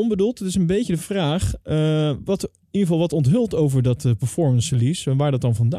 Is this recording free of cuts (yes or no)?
yes